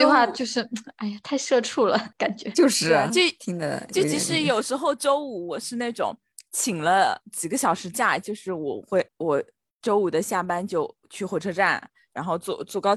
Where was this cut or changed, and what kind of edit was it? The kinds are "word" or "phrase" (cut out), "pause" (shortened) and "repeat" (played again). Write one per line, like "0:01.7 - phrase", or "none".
0:02.1 - pause
0:09.1 - pause
0:11.0 - pause